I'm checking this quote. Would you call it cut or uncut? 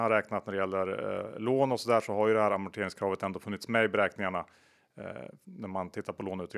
uncut